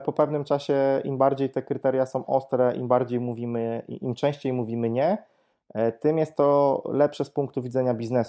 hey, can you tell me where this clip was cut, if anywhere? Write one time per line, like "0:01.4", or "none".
none